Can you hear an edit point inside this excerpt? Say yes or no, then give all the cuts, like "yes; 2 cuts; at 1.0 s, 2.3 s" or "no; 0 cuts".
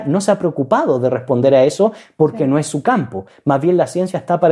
no; 0 cuts